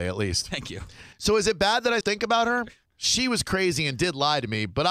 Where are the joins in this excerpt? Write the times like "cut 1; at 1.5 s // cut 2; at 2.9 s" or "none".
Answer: cut 1; at 1.1 s // cut 2; at 2.0 s // cut 3; at 2.9 s